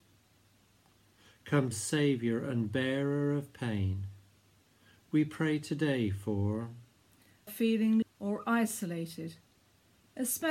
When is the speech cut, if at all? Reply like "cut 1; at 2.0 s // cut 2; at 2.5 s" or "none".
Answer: cut 1; at 1.7 s // cut 2; at 7.5 s // cut 3; at 8.0 s